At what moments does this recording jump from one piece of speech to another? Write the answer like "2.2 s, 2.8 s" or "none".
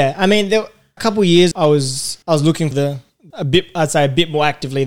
1.0 s, 1.5 s, 2.2 s, 2.7 s, 3.3 s